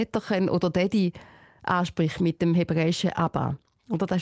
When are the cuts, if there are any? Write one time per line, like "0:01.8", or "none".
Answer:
none